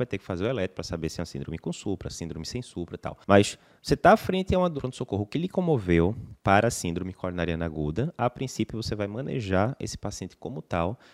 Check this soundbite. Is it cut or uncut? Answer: cut